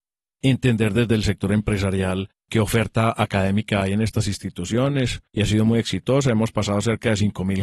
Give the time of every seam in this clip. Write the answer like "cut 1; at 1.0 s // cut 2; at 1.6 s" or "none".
cut 1; at 2.4 s // cut 2; at 5.3 s